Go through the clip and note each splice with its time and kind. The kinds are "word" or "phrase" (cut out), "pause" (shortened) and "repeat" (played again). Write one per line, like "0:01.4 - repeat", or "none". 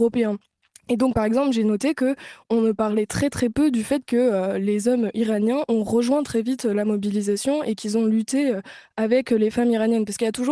none